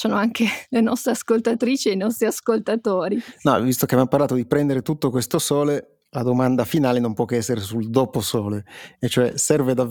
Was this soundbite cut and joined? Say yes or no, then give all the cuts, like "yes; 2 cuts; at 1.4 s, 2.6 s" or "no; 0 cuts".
no; 0 cuts